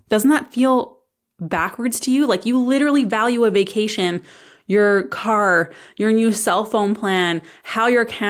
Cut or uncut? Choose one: uncut